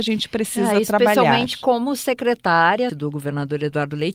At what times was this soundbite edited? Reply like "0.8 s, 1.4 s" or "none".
2.9 s

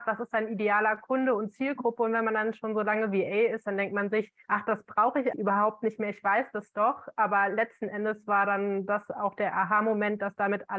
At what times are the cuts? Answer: 4.4 s, 5.3 s

